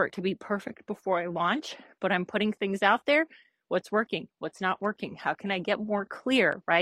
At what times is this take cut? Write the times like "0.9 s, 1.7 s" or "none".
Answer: none